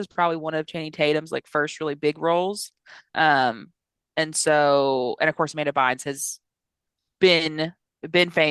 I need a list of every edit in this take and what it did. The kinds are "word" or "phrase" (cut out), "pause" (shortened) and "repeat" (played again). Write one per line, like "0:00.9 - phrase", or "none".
none